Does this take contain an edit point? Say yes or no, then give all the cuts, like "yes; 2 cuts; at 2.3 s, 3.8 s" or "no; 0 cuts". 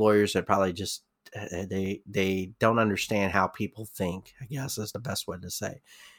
no; 0 cuts